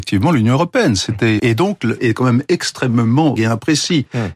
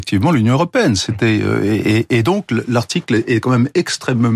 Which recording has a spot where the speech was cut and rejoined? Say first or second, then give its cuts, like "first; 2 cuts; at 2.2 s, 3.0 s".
first; 3 cuts; at 1.4 s, 2.0 s, 3.4 s